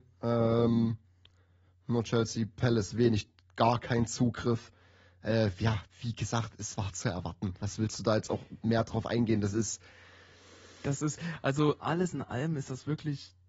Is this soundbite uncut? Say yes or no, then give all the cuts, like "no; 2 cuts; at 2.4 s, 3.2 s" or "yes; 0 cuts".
yes; 0 cuts